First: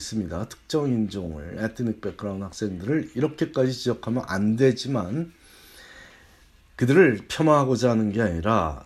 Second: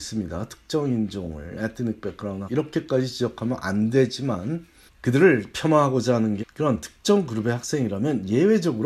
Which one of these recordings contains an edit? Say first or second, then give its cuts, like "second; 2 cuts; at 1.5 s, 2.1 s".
second; 3 cuts; at 2.5 s, 4.9 s, 6.4 s